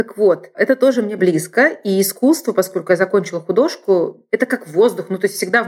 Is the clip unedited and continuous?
yes; 0 cuts

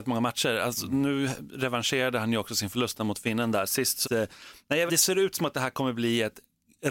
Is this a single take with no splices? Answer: no; 2 cuts; at 4.0 s, 4.9 s

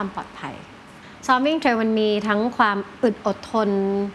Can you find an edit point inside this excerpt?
no; 0 cuts

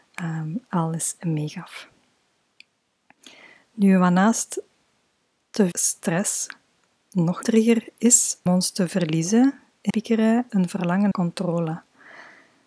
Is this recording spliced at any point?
yes; 6 cuts; at 5.7 s, 7.4 s, 8.5 s, 9.9 s, 10.5 s, 11.1 s

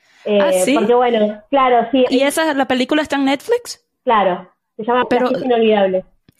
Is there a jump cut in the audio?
yes; 2 cuts; at 2.1 s, 5.0 s

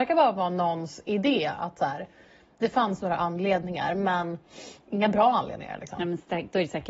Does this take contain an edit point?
no; 0 cuts

